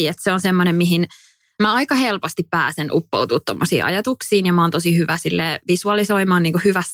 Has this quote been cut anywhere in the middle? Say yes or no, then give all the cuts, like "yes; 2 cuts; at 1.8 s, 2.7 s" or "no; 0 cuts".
no; 0 cuts